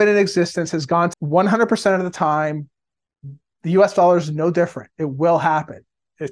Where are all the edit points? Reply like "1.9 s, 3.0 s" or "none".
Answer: 1.1 s

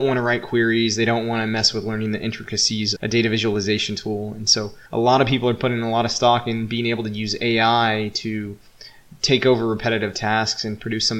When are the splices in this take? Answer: 3.0 s, 4.9 s

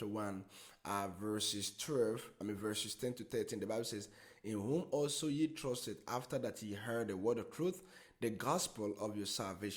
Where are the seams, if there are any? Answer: none

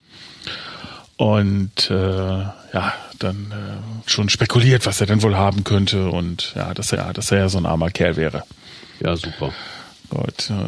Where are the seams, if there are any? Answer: 4.1 s, 6.9 s

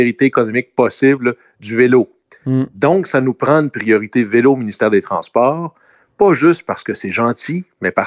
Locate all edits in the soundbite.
none

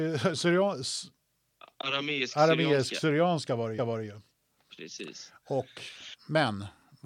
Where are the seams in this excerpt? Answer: 3.8 s

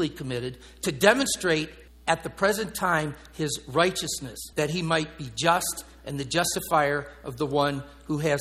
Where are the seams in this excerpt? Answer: 1.9 s, 4.5 s

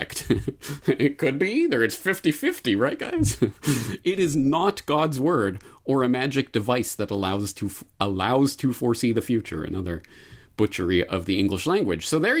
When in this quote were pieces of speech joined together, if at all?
none

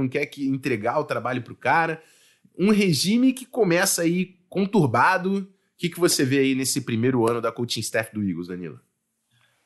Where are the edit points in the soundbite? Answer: none

